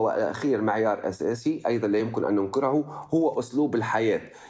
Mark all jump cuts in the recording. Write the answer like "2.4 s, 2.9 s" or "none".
none